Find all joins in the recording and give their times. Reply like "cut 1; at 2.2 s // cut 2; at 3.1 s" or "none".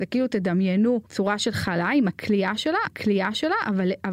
cut 1; at 1.1 s // cut 2; at 2.9 s